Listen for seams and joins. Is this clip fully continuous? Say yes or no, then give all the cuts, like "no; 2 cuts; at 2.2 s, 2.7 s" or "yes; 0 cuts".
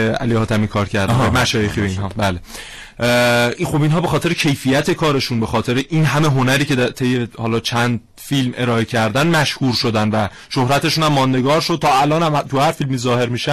yes; 0 cuts